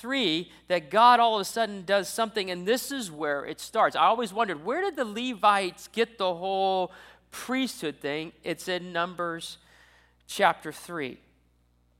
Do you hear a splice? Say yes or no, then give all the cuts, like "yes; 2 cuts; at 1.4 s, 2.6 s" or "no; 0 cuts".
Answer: no; 0 cuts